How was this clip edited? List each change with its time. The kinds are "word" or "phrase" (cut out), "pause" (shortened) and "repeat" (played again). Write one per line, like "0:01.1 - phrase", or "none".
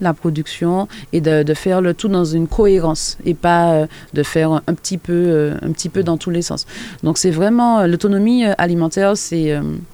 none